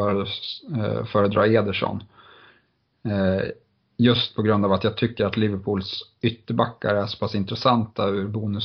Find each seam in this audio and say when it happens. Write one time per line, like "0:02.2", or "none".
none